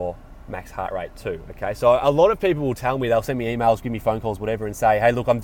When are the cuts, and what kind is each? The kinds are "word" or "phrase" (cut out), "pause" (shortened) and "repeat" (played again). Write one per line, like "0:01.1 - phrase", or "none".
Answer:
none